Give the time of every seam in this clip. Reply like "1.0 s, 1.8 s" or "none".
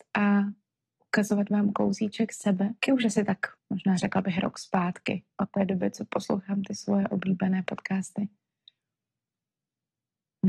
2.8 s, 3.6 s, 5.3 s